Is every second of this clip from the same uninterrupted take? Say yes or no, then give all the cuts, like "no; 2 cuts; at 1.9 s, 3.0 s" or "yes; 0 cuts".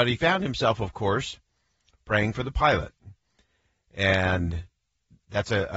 yes; 0 cuts